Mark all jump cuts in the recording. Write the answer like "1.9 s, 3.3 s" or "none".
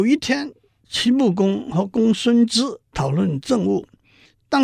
2.8 s

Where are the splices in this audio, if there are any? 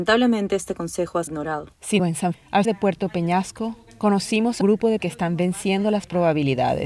1.3 s, 2.0 s, 2.3 s, 2.6 s, 4.6 s, 5.0 s

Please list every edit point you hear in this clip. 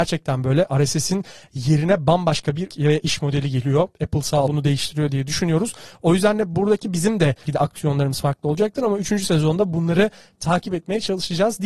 2.7 s, 4.5 s, 7.4 s

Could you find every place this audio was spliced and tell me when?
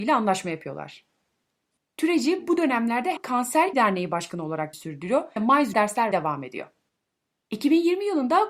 3.2 s, 3.7 s, 4.7 s, 5.4 s, 5.7 s, 6.1 s

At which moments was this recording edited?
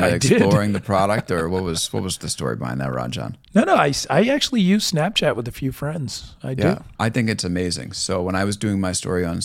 3.4 s, 7.0 s

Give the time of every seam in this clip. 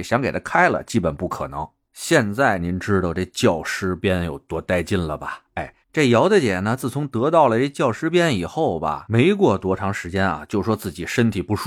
5.8 s

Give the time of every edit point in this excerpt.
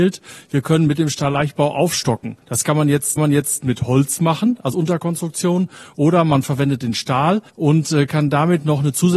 2.4 s, 3.2 s, 4.7 s, 7.5 s

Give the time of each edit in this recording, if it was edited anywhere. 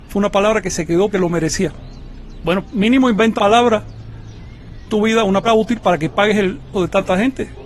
1.1 s, 3.4 s, 4.9 s, 5.4 s, 6.7 s

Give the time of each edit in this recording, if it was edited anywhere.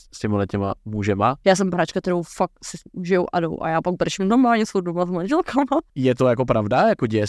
1.7 s

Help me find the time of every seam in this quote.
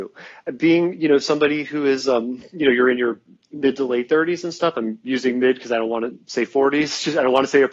none

